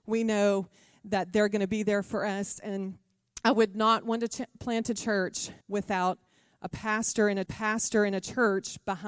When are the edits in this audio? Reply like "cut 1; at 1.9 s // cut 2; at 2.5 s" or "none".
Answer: cut 1; at 5.6 s // cut 2; at 7.5 s